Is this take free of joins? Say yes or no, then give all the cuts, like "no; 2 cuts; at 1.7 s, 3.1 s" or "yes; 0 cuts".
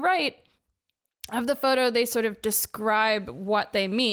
yes; 0 cuts